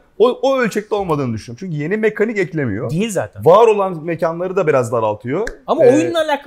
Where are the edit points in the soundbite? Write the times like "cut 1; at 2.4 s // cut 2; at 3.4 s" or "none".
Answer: none